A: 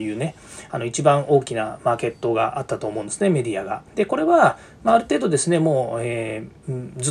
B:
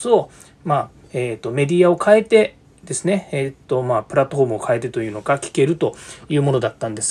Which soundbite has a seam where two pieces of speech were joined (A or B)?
A